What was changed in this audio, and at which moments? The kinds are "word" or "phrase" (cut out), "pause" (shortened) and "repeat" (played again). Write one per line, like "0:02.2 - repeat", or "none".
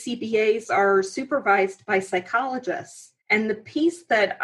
0:03.2 - pause